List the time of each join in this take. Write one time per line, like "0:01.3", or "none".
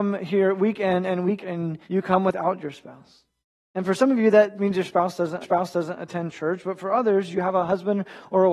0:01.4
0:01.8
0:03.4
0:04.6
0:05.4